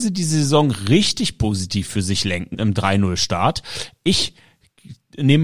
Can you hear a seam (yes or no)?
yes